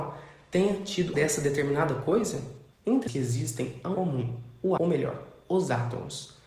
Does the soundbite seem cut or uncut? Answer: cut